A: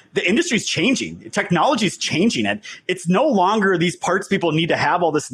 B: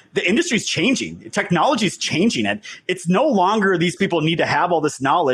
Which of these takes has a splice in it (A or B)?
B